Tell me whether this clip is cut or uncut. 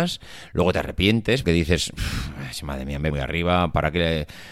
cut